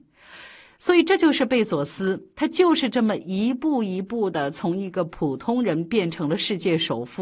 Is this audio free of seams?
yes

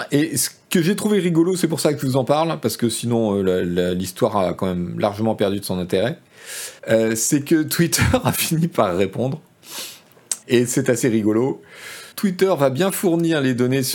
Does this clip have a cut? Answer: yes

